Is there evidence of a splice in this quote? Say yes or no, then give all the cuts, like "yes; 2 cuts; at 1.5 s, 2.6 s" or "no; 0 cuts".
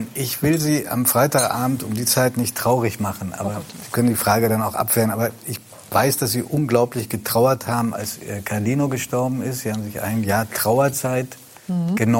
no; 0 cuts